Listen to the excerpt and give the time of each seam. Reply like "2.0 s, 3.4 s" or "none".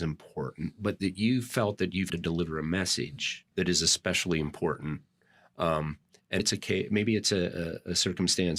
2.1 s, 3.5 s, 6.4 s